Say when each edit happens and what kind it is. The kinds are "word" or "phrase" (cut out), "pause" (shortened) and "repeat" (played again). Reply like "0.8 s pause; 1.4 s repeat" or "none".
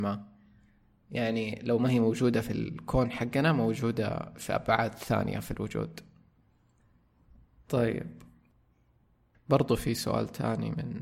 none